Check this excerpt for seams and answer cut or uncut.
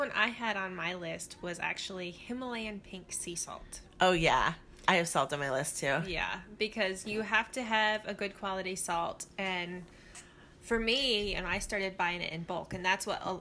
uncut